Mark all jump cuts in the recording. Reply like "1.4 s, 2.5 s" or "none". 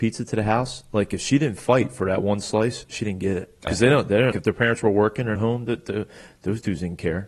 3.7 s, 4.3 s, 5.4 s

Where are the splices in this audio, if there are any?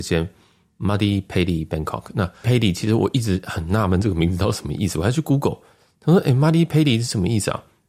2.4 s

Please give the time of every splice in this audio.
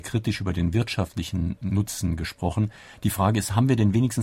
none

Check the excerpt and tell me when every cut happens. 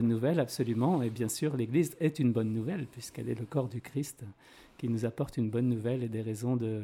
none

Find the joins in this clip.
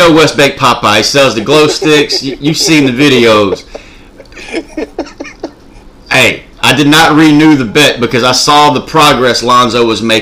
6.5 s

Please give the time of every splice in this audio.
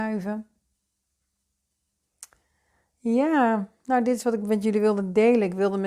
none

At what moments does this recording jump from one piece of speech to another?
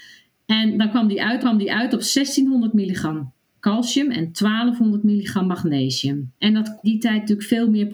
1.4 s, 3.4 s, 6.4 s, 6.8 s

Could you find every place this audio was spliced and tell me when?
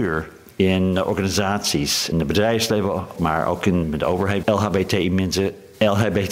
2.1 s, 3.2 s, 3.8 s, 4.4 s

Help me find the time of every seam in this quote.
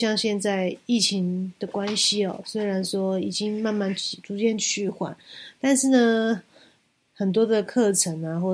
none

